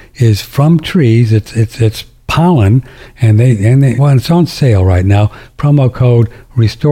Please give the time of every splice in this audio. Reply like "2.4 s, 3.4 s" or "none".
4.0 s